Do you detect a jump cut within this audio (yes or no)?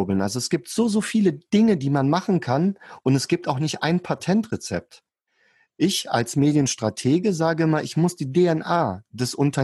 no